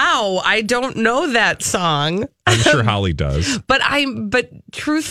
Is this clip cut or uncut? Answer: uncut